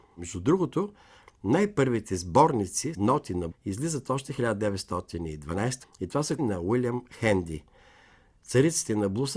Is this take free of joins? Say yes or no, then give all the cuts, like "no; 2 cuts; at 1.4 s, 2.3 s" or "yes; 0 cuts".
no; 4 cuts; at 2.9 s, 3.5 s, 5.8 s, 6.4 s